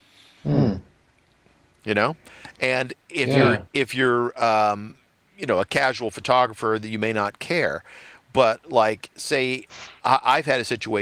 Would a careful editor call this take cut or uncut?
uncut